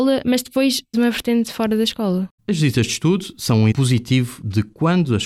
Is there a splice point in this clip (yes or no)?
yes